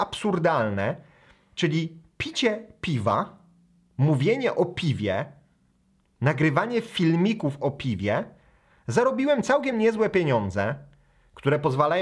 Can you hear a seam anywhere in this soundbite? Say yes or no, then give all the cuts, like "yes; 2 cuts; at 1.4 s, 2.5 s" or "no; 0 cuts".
no; 0 cuts